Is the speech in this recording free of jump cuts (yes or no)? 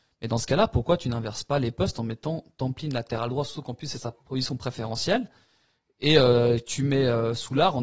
yes